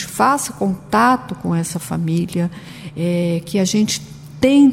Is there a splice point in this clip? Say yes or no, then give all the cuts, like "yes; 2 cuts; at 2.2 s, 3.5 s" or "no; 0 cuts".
no; 0 cuts